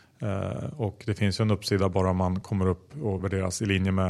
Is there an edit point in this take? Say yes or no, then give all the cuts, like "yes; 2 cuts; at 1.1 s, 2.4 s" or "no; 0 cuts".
no; 0 cuts